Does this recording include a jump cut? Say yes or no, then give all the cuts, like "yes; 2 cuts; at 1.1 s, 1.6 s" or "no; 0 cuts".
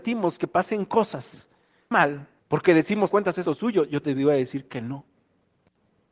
yes; 4 cuts; at 1.9 s, 2.4 s, 3.1 s, 3.5 s